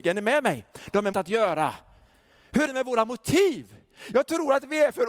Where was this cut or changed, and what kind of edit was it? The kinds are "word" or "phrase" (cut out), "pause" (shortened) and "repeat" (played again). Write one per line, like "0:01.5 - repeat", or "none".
0:01.1 - word
0:02.7 - word